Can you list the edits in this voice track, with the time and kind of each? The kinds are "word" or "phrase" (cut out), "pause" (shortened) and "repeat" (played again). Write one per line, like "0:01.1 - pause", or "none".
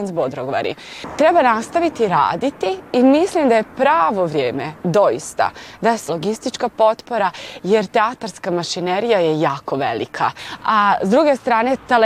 0:04.8 - pause
0:06.1 - phrase